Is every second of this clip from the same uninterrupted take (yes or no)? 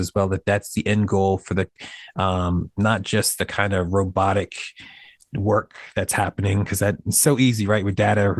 yes